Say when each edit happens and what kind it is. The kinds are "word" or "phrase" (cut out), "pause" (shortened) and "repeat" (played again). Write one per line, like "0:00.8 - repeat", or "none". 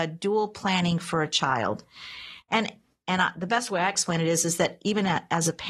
none